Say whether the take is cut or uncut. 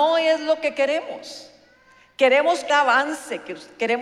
cut